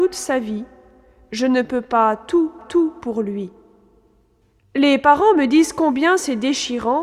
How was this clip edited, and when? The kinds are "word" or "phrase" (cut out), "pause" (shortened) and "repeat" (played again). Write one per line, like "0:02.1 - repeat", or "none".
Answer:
0:02.6 - repeat